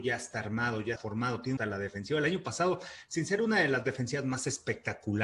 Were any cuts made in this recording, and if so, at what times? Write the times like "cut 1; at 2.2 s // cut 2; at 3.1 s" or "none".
cut 1; at 1.0 s // cut 2; at 1.6 s